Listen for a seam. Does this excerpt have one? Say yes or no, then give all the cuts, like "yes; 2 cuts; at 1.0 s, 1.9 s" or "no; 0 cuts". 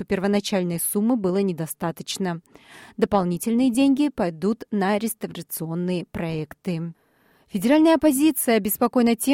no; 0 cuts